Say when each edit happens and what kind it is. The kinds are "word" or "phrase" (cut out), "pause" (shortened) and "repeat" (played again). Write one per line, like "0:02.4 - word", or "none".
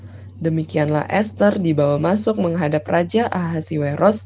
none